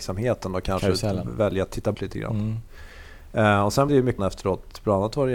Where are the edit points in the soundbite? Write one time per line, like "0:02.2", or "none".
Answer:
0:01.9
0:03.9
0:04.2